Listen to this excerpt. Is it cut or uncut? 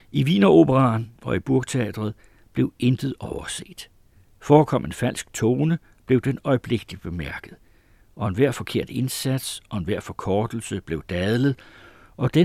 uncut